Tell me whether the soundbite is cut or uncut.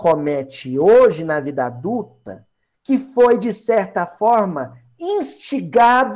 uncut